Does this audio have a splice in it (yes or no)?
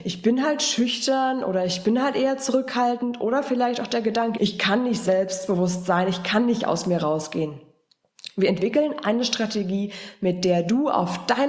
yes